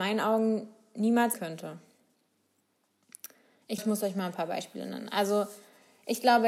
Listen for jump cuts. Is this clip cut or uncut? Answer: cut